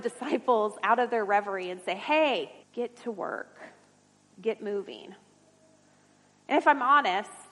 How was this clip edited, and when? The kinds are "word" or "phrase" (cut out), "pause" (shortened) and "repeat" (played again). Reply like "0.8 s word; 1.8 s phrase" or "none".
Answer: 2.6 s pause